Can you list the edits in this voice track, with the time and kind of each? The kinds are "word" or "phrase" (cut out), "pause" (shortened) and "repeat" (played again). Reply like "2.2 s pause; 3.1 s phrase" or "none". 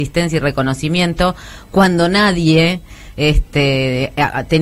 none